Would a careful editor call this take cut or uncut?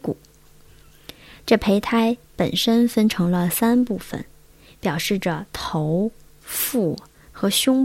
uncut